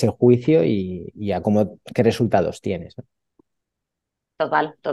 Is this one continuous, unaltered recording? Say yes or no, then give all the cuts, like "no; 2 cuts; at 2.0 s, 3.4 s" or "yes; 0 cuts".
yes; 0 cuts